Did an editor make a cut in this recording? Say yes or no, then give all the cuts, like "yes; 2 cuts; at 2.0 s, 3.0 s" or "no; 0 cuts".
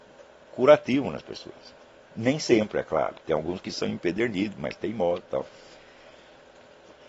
no; 0 cuts